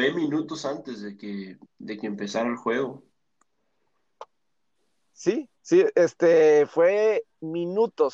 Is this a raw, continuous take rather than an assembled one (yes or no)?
no